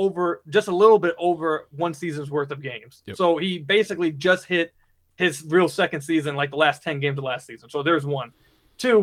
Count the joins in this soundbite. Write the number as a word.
zero